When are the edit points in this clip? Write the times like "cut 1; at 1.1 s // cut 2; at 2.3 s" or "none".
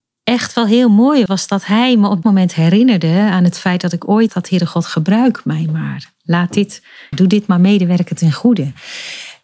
cut 1; at 1.3 s // cut 2; at 2.2 s // cut 3; at 4.3 s // cut 4; at 7.1 s